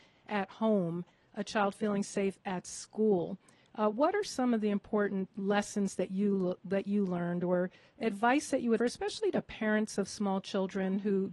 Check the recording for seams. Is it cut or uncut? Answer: cut